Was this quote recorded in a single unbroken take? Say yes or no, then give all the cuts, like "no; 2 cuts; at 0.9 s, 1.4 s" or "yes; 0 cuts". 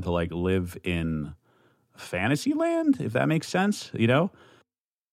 yes; 0 cuts